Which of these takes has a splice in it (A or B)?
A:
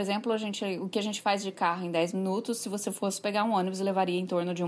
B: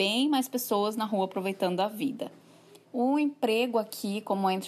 B